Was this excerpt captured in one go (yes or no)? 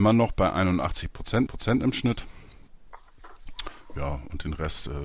no